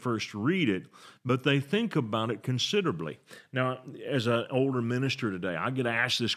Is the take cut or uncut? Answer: uncut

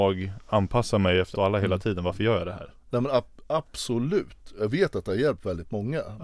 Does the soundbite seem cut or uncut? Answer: cut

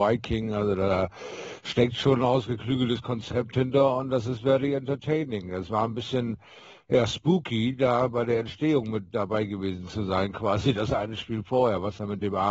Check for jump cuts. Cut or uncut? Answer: uncut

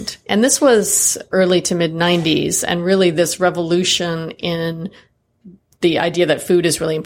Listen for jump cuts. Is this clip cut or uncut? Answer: uncut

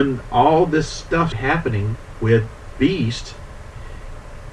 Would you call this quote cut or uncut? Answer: cut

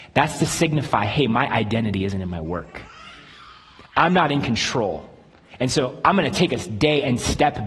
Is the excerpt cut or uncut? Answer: uncut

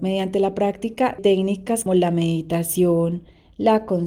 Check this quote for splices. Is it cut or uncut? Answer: cut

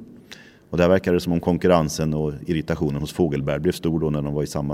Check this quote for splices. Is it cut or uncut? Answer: uncut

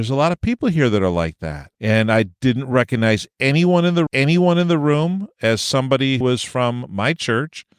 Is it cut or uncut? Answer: cut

